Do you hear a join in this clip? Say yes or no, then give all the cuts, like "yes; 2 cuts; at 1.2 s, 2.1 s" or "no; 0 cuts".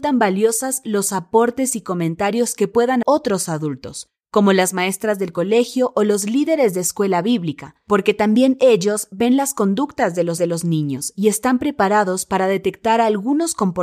yes; 2 cuts; at 3.0 s, 10.4 s